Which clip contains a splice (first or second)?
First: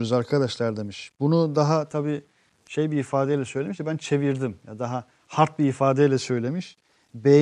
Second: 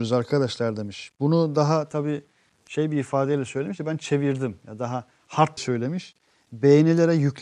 second